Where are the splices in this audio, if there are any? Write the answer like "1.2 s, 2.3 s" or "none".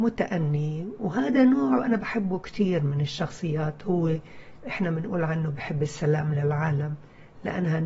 none